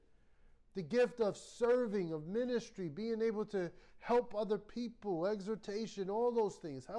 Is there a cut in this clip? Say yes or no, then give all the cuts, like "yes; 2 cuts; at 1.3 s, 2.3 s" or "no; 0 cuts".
no; 0 cuts